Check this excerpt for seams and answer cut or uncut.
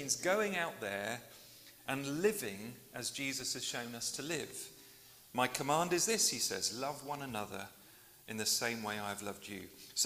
uncut